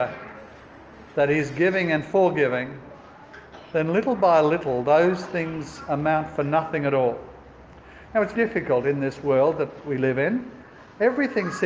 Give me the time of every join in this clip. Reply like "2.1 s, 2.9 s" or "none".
8.3 s